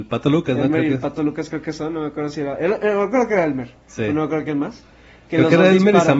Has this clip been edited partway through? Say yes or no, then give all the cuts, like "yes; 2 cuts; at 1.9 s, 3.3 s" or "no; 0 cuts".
no; 0 cuts